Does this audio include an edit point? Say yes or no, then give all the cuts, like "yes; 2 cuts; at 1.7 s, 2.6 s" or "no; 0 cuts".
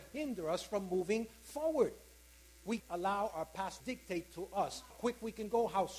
yes; 3 cuts; at 2.8 s, 3.8 s, 4.9 s